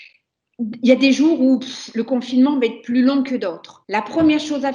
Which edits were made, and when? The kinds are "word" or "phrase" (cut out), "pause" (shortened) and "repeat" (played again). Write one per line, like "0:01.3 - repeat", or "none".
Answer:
0:03.8 - pause